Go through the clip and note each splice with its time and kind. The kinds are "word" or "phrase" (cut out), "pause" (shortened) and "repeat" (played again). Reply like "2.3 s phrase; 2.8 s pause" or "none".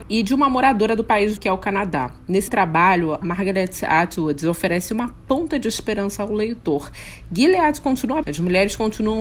1.4 s word; 2.5 s word; 3.2 s word; 8.2 s word